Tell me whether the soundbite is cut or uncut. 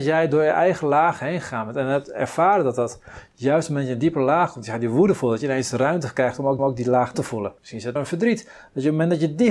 cut